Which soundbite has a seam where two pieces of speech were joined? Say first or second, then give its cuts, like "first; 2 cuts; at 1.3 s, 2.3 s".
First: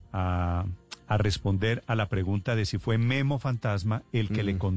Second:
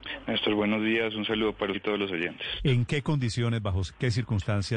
second; 1 cut; at 1.7 s